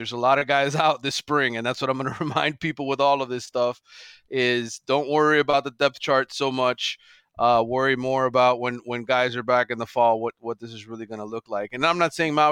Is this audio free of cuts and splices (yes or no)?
yes